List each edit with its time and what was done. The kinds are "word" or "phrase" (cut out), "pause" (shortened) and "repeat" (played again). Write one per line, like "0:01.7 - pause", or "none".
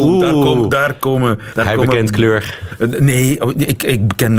0:01.5 - word